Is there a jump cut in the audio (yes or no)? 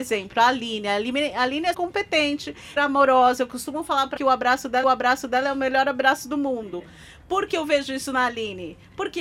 yes